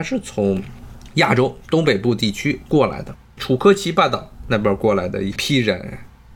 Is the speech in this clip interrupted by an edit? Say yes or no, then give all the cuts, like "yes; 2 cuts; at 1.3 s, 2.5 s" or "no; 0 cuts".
yes; 1 cut; at 3.2 s